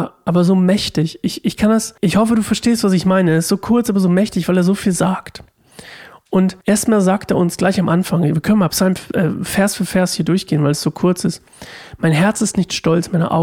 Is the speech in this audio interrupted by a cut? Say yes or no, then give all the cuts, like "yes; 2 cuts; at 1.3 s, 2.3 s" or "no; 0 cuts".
yes; 2 cuts; at 2.0 s, 6.6 s